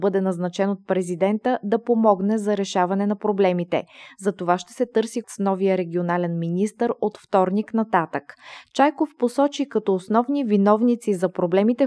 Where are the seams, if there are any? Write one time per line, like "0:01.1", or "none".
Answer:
0:05.2